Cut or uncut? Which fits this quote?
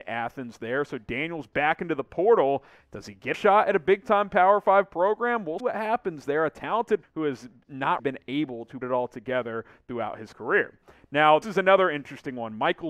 cut